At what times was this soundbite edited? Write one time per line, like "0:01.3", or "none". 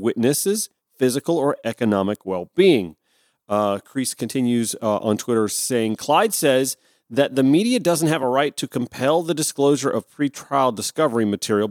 none